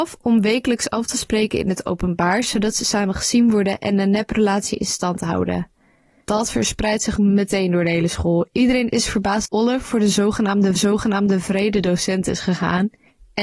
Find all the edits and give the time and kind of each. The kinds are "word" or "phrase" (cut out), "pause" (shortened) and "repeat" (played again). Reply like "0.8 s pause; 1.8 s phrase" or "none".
7.2 s word; 9.5 s word; 10.8 s repeat